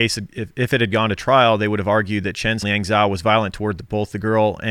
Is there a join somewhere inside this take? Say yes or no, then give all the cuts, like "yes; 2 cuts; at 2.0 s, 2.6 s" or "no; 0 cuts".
yes; 1 cut; at 2.6 s